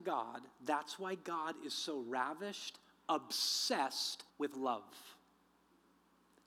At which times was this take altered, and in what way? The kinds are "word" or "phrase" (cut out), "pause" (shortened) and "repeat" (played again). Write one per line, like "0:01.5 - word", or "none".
0:04.3 - pause